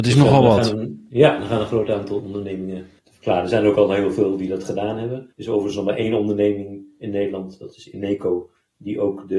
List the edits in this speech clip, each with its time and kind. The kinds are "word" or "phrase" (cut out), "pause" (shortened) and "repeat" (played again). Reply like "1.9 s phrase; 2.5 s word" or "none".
3.0 s pause; 5.3 s pause